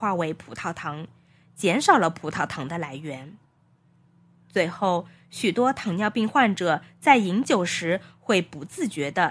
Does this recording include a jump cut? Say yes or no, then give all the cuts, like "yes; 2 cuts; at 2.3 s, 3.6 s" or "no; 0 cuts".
no; 0 cuts